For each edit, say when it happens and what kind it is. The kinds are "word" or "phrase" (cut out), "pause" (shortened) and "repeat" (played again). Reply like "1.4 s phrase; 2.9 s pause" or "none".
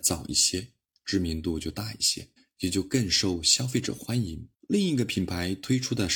2.4 s pause; 4.5 s pause